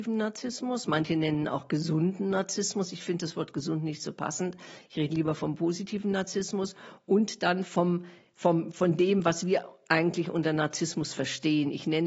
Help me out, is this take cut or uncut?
uncut